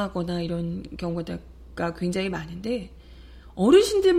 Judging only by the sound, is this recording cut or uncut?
uncut